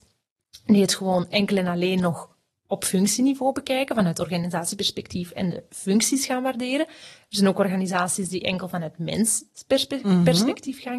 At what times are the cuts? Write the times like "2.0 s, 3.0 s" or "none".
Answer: none